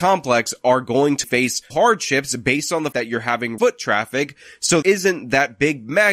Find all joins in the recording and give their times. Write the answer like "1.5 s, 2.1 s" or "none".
1.2 s, 1.7 s, 2.9 s, 3.6 s, 4.8 s